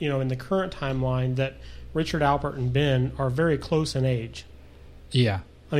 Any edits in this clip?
no; 0 cuts

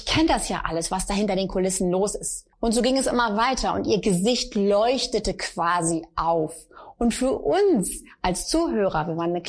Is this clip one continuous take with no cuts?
no; 1 cut; at 2.5 s

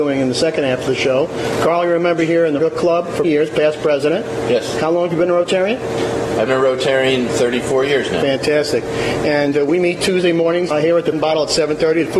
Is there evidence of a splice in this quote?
yes; 6 cuts; at 2.6 s, 3.2 s, 6.5 s, 7.3 s, 10.7 s, 11.1 s

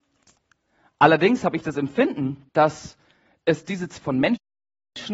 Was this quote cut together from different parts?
yes; 1 cut; at 2.5 s

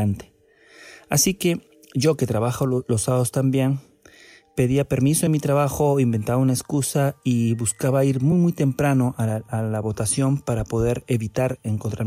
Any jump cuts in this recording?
no; 0 cuts

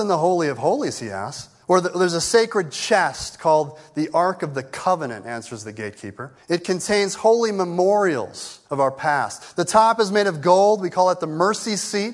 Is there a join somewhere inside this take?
yes; 3 cuts; at 1.6 s, 6.4 s, 8.6 s

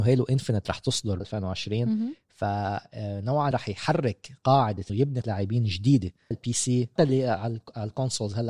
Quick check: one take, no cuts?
no; 6 cuts; at 1.2 s, 3.5 s, 4.9 s, 5.2 s, 6.3 s, 7.0 s

